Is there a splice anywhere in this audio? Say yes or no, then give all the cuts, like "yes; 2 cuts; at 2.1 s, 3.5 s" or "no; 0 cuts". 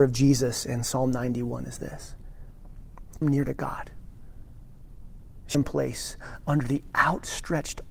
yes; 2 cuts; at 3.2 s, 5.5 s